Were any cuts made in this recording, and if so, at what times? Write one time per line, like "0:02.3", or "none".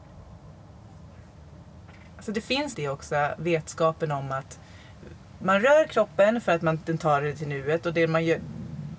0:02.7